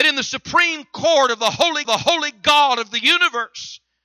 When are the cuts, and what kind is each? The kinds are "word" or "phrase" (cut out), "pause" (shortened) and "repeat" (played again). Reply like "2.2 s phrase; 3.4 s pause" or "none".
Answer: 1.8 s repeat